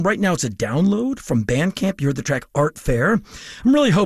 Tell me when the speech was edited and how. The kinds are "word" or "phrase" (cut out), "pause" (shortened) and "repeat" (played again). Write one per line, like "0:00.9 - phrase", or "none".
none